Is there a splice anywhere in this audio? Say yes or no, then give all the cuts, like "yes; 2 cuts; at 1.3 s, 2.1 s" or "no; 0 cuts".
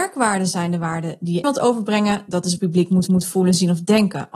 yes; 3 cuts; at 1.4 s, 2.6 s, 3.1 s